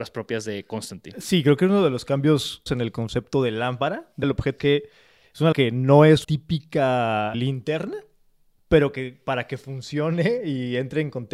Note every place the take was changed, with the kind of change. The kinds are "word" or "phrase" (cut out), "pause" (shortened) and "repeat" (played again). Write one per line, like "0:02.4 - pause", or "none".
0:02.7 - word
0:04.2 - word
0:04.6 - word
0:05.5 - word
0:06.2 - word
0:07.3 - word